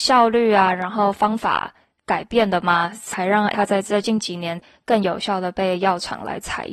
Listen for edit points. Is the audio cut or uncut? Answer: cut